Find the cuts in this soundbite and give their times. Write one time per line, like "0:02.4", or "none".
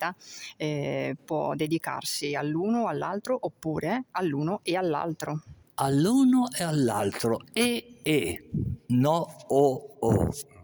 none